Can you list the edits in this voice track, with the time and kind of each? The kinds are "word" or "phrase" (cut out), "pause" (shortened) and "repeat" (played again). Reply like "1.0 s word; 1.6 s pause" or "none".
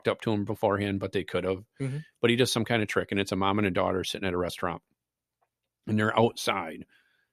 none

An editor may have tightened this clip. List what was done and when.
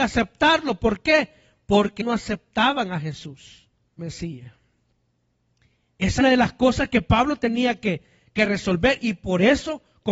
2.0 s word; 4.0 s phrase; 6.2 s phrase

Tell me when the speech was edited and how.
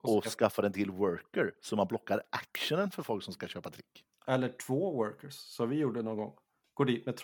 none

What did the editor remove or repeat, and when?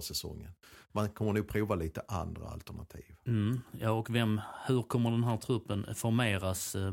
none

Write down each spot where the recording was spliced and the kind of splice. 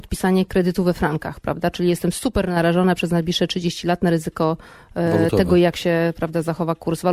none

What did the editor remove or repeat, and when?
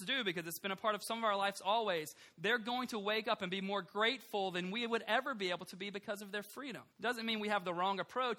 6.9 s pause

